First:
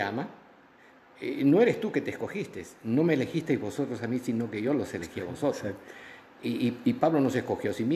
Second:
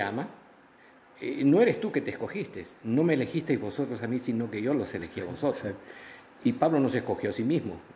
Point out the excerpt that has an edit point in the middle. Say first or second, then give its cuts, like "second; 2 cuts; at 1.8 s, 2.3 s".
second; 1 cut; at 6.4 s